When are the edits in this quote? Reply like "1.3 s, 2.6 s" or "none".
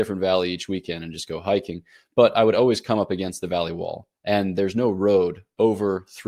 none